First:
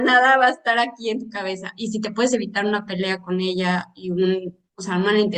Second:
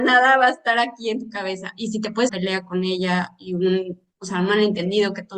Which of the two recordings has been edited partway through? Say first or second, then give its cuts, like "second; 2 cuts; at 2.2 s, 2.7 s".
second; 1 cut; at 2.3 s